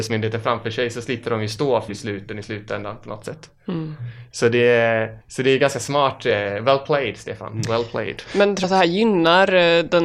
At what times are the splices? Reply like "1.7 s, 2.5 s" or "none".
1.9 s, 5.2 s, 8.6 s